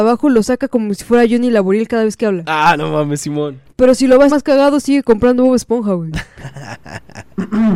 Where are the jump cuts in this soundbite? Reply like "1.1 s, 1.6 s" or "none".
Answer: 3.7 s, 4.3 s